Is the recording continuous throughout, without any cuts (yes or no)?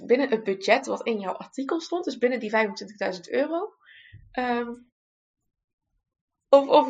yes